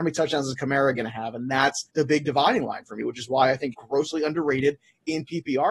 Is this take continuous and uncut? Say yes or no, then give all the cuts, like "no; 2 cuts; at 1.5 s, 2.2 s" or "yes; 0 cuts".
no; 2 cuts; at 1.9 s, 3.7 s